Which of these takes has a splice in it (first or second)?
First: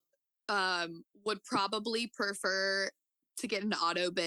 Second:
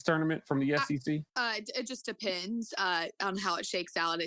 second